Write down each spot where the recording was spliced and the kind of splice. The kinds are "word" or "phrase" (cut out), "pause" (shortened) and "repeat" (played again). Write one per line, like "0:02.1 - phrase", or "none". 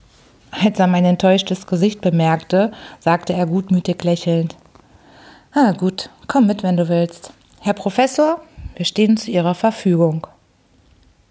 none